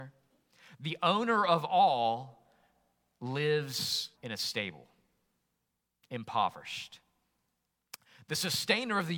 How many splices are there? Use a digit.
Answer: 1